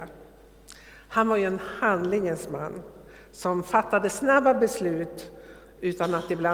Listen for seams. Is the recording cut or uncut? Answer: uncut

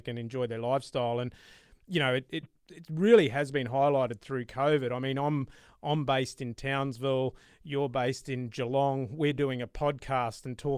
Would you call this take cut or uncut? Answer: uncut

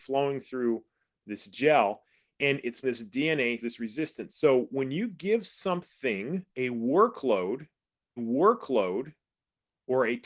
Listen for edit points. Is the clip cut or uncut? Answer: cut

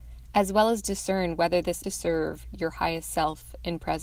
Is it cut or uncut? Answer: cut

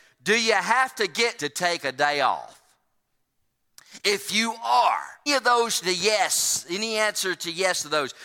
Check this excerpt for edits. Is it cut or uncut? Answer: cut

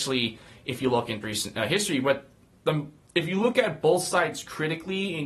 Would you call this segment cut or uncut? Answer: cut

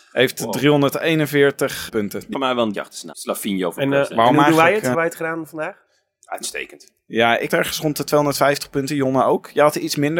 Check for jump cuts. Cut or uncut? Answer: cut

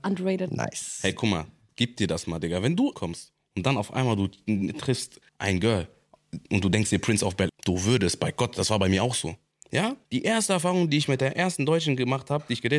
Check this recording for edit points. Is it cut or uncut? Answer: cut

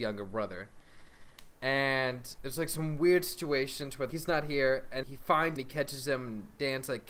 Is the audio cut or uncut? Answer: cut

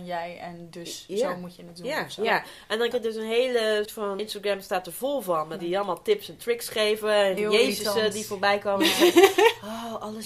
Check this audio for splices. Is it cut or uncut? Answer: cut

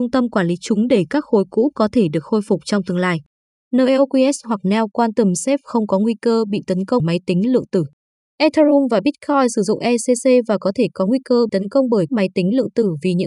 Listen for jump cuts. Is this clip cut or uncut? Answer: cut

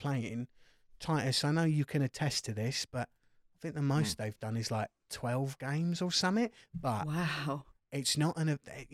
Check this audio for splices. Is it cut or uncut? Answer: uncut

